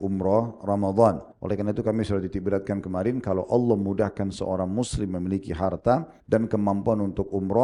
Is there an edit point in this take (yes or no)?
yes